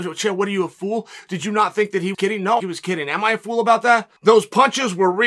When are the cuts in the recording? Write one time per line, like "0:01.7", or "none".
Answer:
0:02.1
0:02.6
0:04.2